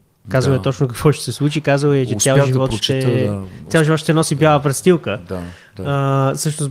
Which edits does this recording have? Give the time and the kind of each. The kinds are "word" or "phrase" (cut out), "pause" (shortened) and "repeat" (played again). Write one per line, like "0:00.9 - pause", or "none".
none